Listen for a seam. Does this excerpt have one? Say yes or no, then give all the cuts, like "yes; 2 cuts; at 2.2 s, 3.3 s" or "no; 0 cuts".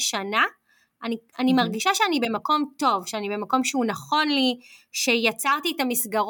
no; 0 cuts